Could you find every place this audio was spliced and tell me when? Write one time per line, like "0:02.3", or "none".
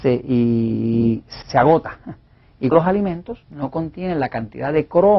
0:01.4
0:02.7
0:03.4